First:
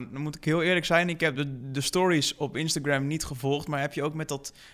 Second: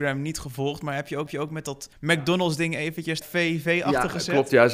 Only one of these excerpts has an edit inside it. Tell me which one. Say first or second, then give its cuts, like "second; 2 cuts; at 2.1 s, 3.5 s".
second; 3 cuts; at 1.3 s, 1.9 s, 3.2 s